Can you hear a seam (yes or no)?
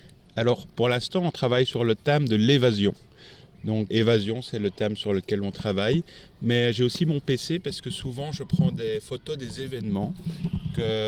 yes